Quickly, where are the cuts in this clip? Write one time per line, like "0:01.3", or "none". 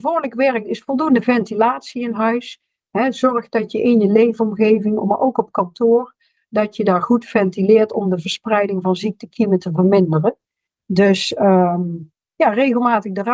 none